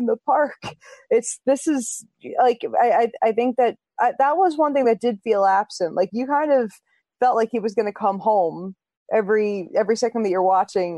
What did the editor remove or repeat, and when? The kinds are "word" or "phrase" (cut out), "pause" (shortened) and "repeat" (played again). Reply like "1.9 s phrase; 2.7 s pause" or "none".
none

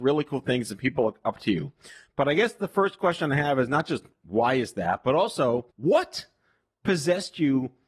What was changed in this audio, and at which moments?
5.7 s pause

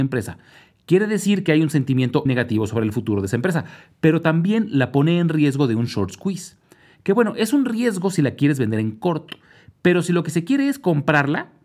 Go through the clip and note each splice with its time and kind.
2.3 s word

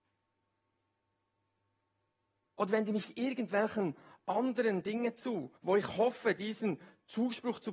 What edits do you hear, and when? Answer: 5.6 s pause

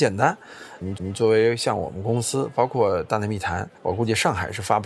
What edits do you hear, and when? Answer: 1.0 s repeat; 3.8 s pause

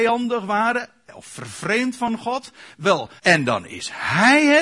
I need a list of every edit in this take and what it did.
3.2 s pause

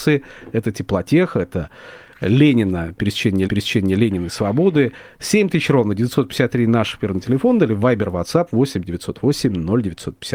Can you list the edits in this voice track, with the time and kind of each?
3.4 s repeat

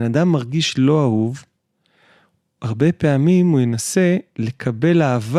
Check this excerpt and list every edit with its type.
none

